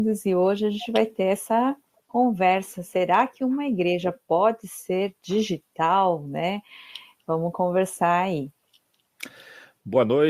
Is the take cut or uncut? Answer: uncut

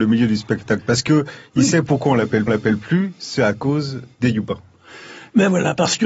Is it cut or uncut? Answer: cut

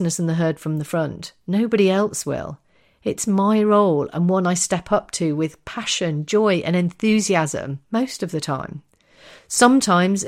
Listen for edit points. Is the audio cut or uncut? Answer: cut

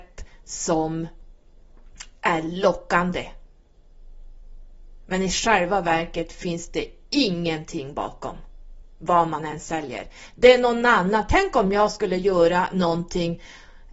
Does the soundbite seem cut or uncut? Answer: uncut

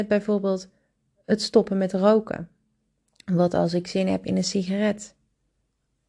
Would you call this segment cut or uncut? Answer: uncut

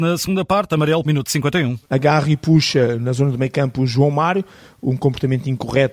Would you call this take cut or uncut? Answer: cut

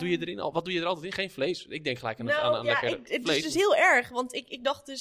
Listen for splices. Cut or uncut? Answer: uncut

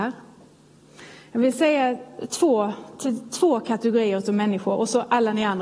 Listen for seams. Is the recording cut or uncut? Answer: uncut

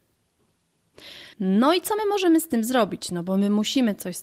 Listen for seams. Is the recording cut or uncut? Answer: cut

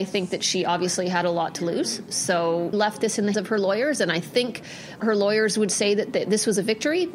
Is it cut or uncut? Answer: cut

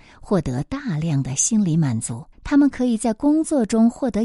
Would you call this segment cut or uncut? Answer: cut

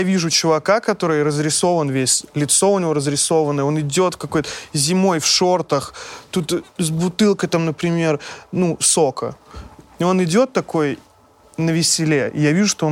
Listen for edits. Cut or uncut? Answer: uncut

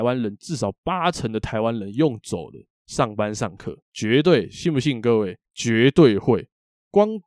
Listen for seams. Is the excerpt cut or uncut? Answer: cut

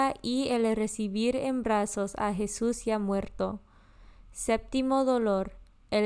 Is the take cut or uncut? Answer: uncut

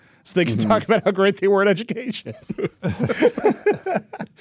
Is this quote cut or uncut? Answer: uncut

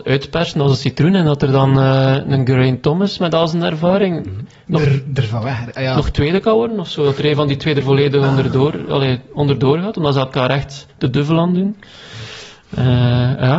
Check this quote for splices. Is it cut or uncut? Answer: uncut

